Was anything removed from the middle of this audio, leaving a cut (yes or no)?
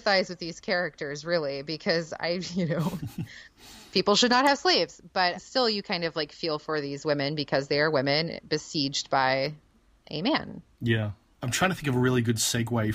no